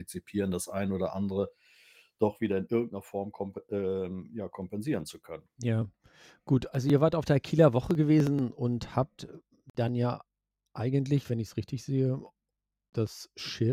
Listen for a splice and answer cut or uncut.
uncut